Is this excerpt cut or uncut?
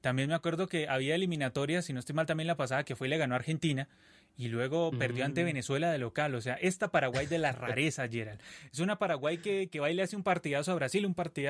uncut